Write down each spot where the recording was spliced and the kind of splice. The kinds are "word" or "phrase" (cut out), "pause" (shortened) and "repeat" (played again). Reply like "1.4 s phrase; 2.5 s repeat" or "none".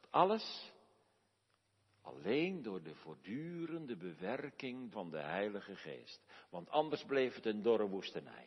4.9 s phrase

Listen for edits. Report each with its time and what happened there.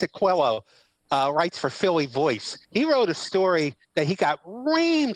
2.6 s pause; 3.8 s pause

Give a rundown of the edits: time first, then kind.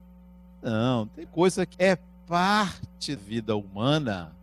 1.3 s word; 1.7 s word; 3.2 s word

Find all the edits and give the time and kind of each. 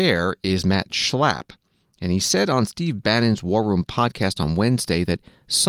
none

